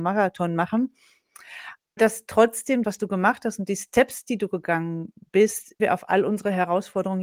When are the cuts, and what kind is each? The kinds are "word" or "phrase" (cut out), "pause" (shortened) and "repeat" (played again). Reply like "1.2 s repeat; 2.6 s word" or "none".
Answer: 2.0 s word; 2.8 s word; 5.8 s word